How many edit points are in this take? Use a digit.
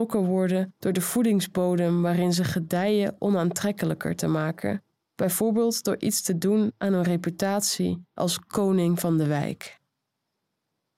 0